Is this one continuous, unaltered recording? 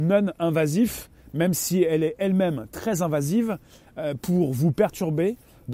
yes; 0 cuts

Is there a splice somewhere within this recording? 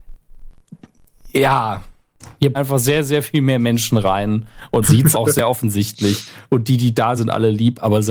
yes; 4 cuts; at 2.5 s, 4.8 s, 5.1 s, 7.2 s

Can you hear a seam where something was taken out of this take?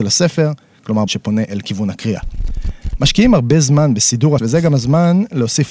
yes; 2 cuts; at 1.1 s, 4.4 s

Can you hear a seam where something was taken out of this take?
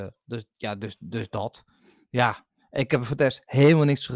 no; 0 cuts

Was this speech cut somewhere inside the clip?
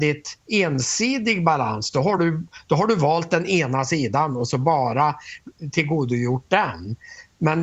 no; 0 cuts

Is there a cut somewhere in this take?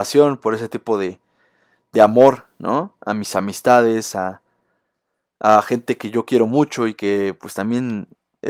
no; 0 cuts

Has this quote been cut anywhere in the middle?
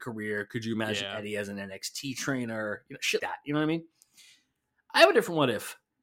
yes; 1 cut; at 3.2 s

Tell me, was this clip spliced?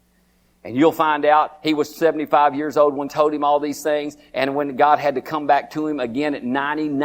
yes; 1 cut; at 3.1 s

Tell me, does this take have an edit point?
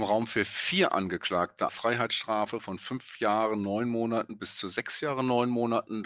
yes; 1 cut; at 1.7 s

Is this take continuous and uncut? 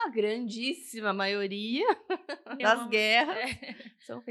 no; 1 cut; at 2.6 s

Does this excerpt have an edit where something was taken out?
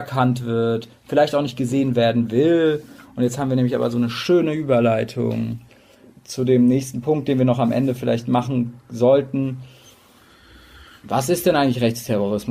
no; 0 cuts

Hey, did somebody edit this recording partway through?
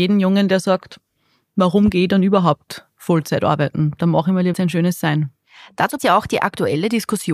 yes; 2 cuts; at 4.5 s, 6.0 s

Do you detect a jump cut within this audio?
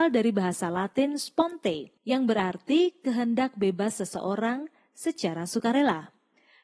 yes; 1 cut; at 2.0 s

